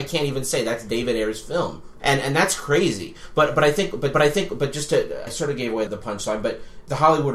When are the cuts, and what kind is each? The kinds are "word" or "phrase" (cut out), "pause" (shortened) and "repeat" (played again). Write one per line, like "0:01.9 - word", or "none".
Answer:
0:02.0 - word
0:04.1 - repeat
0:05.3 - word
0:05.9 - word